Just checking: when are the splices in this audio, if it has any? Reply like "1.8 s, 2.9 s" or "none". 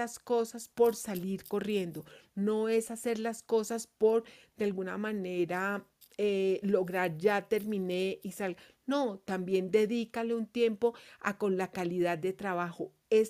none